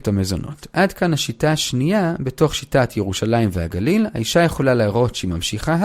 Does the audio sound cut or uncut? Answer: uncut